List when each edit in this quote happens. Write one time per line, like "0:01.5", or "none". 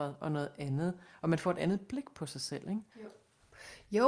0:02.9